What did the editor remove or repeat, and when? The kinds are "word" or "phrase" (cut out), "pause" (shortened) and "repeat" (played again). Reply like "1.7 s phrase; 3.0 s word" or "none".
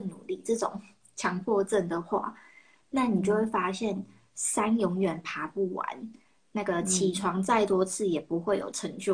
none